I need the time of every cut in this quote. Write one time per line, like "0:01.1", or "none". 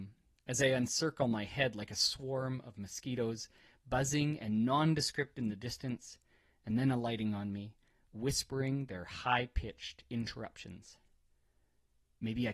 none